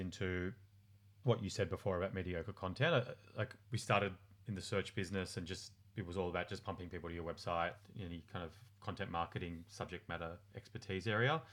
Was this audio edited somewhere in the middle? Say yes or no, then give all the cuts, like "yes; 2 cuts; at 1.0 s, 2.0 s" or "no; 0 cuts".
no; 0 cuts